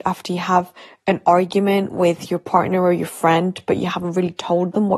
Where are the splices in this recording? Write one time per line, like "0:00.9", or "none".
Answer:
none